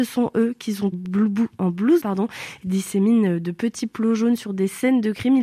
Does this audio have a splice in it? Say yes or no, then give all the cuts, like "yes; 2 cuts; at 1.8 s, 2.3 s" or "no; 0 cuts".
yes; 3 cuts; at 0.9 s, 2.0 s, 2.6 s